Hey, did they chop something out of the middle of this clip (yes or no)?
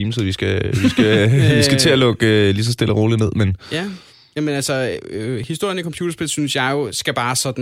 no